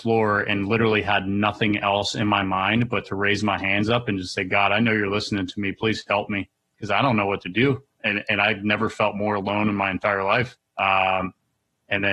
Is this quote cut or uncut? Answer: cut